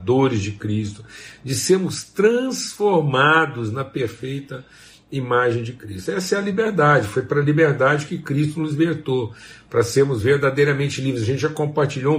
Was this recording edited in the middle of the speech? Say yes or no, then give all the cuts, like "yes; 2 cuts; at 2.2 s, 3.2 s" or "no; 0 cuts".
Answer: no; 0 cuts